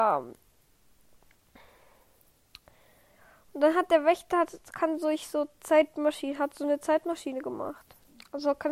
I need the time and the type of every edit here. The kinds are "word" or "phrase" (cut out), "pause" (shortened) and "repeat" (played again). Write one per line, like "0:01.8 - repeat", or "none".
none